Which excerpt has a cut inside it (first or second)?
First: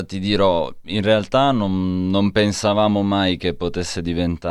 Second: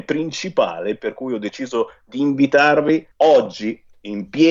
second